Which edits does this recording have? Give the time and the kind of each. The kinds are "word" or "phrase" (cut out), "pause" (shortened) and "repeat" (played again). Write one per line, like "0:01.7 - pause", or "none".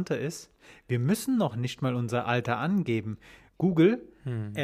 none